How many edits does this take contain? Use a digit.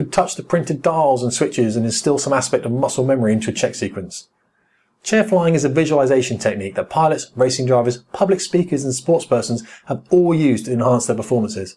0